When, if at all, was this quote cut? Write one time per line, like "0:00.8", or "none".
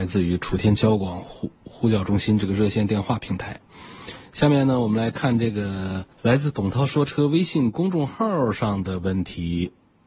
0:06.1